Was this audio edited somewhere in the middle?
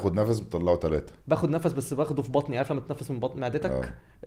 yes; 1 cut; at 1.2 s

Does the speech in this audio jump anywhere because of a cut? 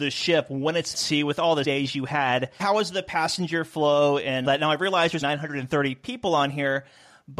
yes; 5 cuts; at 0.9 s, 1.6 s, 2.6 s, 4.4 s, 5.2 s

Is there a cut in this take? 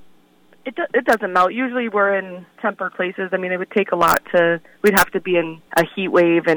yes; 2 cuts; at 2.5 s, 5.7 s

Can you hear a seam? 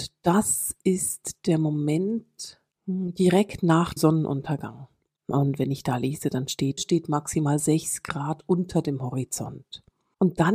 yes; 2 cuts; at 4.0 s, 6.8 s

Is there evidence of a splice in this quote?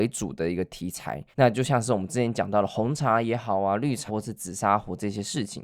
yes; 2 cuts; at 1.3 s, 4.1 s

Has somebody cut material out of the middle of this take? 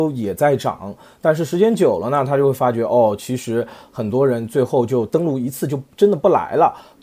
no; 0 cuts

